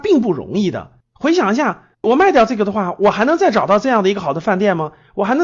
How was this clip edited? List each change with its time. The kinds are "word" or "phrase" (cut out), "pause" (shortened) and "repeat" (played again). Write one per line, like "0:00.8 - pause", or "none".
0:01.0 - pause
0:01.9 - pause